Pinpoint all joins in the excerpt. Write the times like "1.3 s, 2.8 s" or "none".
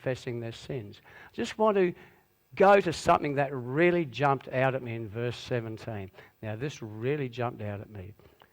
none